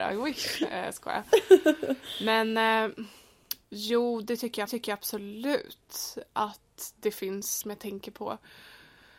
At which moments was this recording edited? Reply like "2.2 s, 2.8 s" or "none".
3.6 s, 4.7 s, 7.6 s